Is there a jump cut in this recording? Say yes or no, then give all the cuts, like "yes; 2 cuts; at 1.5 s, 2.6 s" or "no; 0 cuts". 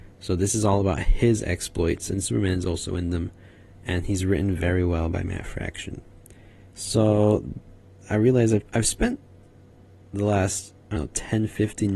yes; 2 cuts; at 8.7 s, 11.0 s